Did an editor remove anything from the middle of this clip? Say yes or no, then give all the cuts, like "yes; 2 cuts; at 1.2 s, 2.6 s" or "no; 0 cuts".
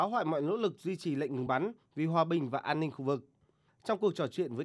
no; 0 cuts